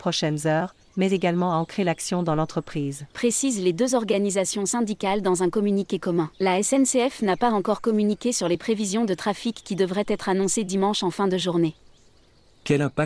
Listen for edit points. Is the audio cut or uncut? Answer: cut